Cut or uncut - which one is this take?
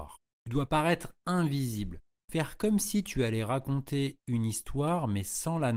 uncut